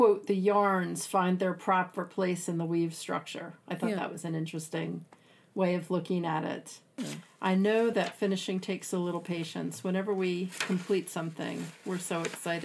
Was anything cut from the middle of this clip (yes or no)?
no